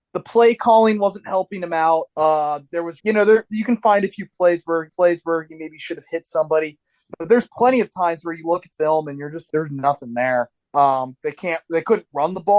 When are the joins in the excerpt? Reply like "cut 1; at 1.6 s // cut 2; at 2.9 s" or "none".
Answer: cut 1; at 2.1 s // cut 2; at 3.0 s // cut 3; at 4.9 s // cut 4; at 8.7 s // cut 5; at 9.5 s // cut 6; at 10.5 s